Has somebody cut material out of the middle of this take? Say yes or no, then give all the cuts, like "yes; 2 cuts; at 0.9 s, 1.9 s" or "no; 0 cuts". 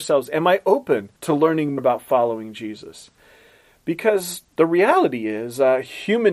yes; 3 cuts; at 1.1 s, 1.8 s, 4.5 s